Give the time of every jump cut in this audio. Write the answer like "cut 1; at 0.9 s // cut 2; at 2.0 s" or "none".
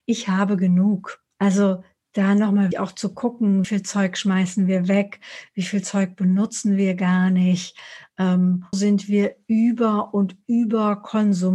cut 1; at 1.3 s // cut 2; at 2.7 s // cut 3; at 3.6 s // cut 4; at 8.7 s